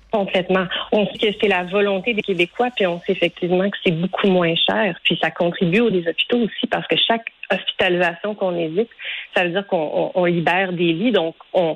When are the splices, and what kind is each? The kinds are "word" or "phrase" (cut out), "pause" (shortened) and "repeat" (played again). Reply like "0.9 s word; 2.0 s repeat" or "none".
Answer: 1.1 s word; 5.9 s word